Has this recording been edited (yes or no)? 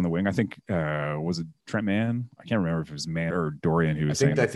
yes